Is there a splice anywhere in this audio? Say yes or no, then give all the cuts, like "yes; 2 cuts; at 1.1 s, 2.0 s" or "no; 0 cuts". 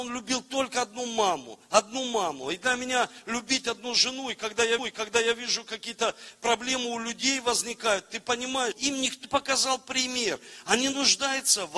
yes; 3 cuts; at 4.8 s, 8.7 s, 9.2 s